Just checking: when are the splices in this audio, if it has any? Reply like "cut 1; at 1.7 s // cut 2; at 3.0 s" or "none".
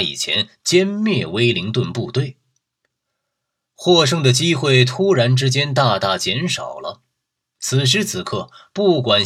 none